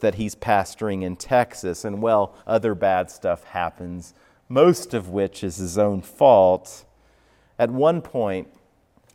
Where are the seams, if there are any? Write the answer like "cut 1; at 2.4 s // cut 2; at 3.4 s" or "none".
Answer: cut 1; at 2.4 s